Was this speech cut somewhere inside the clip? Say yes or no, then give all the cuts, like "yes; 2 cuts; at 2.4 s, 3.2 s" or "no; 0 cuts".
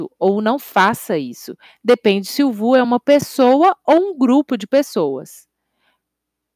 no; 0 cuts